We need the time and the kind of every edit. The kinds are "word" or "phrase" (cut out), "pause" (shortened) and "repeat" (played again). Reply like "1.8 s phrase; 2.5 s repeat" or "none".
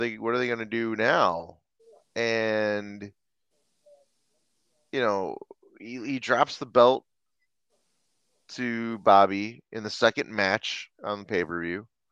none